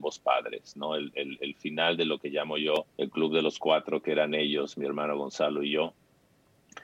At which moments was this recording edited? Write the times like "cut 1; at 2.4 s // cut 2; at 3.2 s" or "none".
cut 1; at 2.9 s